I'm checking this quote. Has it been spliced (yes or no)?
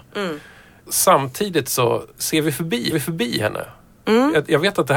yes